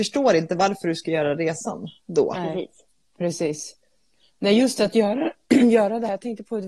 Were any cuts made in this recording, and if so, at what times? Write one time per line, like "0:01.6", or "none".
none